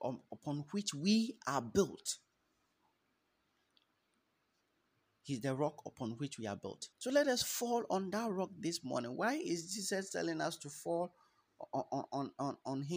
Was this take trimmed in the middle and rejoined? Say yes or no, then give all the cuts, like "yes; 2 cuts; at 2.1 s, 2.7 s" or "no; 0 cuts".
yes; 1 cut; at 6.9 s